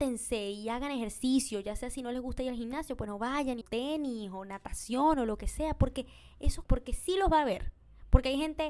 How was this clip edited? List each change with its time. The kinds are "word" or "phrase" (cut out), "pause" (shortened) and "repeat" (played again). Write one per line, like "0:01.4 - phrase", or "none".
0:03.6 - phrase
0:06.6 - word